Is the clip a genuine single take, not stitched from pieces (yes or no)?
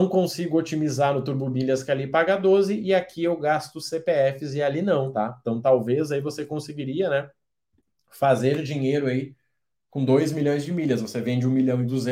yes